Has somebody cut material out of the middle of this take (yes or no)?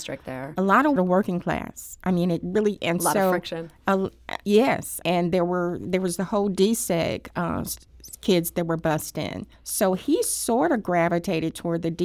yes